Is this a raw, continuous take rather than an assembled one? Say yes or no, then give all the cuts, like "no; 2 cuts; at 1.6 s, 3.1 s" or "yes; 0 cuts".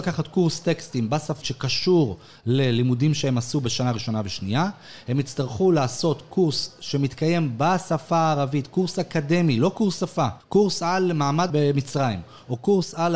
no; 3 cuts; at 1.4 s, 10.4 s, 11.5 s